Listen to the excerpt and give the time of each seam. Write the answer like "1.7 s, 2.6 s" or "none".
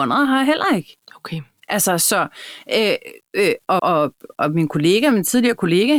1.0 s, 3.8 s